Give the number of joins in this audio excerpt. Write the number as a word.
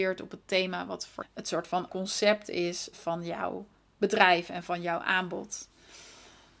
three